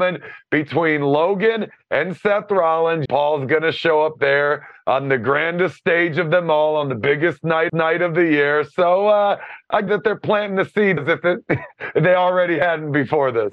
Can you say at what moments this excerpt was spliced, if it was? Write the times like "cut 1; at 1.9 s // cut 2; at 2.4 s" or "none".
cut 1; at 3.0 s // cut 2; at 7.7 s // cut 3; at 9.9 s // cut 4; at 11.0 s